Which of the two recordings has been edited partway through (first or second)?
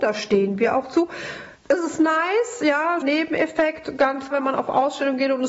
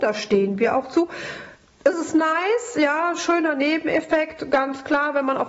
first